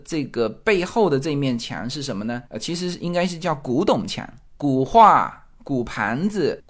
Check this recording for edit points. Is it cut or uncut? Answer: cut